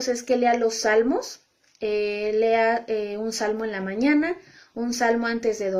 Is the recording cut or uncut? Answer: uncut